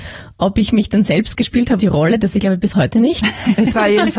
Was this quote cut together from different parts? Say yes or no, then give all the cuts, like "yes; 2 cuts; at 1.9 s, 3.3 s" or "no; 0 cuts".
yes; 2 cuts; at 1.8 s, 2.3 s